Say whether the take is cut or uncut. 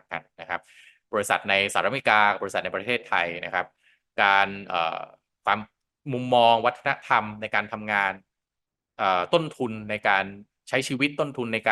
uncut